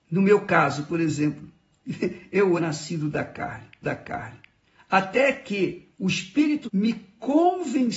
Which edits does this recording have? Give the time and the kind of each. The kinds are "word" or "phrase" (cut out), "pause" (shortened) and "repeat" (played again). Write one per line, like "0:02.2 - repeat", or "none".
0:02.6 - word
0:03.8 - repeat
0:05.9 - pause
0:06.7 - word

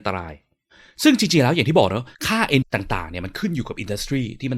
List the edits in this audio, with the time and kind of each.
0:02.1 - pause
0:02.6 - word

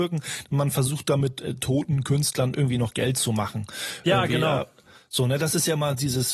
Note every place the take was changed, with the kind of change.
none

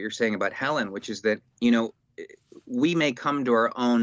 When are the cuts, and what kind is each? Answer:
0:01.5 - pause

